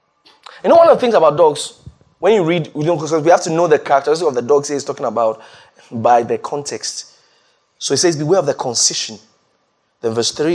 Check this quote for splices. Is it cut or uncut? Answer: uncut